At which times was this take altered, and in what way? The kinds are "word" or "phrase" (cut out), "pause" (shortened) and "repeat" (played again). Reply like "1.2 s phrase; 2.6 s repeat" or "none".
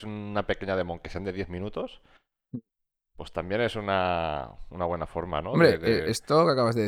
none